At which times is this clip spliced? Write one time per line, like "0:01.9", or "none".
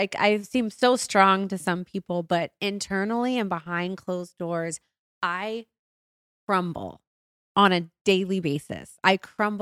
none